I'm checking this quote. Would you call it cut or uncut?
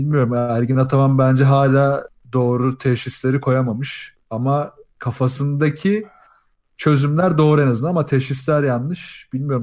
uncut